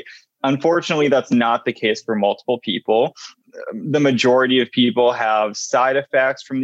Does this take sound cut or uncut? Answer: uncut